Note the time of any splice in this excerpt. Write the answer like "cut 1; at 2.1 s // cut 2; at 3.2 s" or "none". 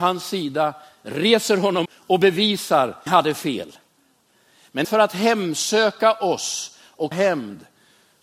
cut 1; at 1.8 s // cut 2; at 3.1 s // cut 3; at 4.8 s // cut 4; at 7.1 s